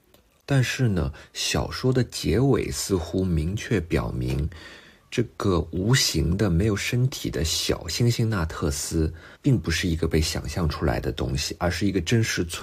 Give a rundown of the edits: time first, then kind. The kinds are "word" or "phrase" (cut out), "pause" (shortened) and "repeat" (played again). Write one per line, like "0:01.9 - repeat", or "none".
0:09.3 - pause